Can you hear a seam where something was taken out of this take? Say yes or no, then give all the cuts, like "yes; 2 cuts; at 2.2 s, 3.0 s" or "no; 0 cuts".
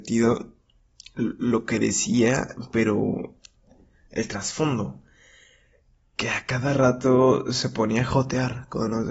no; 0 cuts